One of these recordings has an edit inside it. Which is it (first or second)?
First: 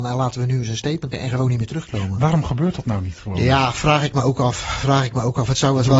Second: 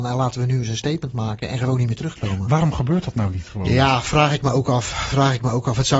first